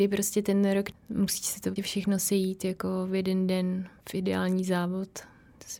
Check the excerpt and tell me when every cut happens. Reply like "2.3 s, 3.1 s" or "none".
0.9 s, 1.8 s